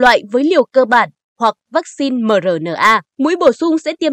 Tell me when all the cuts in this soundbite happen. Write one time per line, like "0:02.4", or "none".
0:03.1